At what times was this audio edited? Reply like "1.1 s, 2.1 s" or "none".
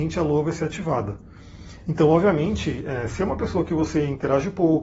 none